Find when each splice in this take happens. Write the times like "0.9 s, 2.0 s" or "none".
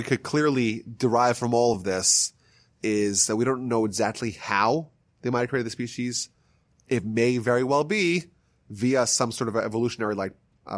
none